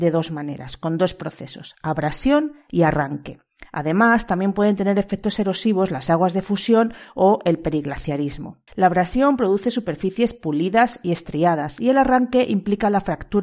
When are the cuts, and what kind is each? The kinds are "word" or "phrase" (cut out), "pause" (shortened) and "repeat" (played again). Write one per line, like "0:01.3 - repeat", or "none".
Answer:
0:08.7 - pause